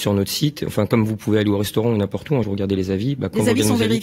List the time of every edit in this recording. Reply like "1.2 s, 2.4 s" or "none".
2.4 s